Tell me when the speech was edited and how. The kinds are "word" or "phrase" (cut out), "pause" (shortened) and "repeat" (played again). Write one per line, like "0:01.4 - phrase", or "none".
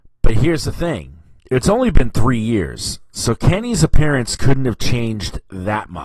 0:01.4 - pause